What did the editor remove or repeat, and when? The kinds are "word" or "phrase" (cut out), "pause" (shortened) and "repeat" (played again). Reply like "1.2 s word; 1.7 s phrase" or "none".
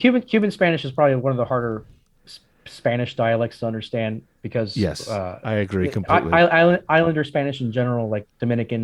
none